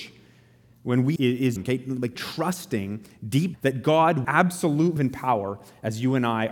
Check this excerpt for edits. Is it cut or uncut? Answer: cut